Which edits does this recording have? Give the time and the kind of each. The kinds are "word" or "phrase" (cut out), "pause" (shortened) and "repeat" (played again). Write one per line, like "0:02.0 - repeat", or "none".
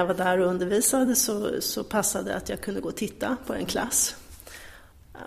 none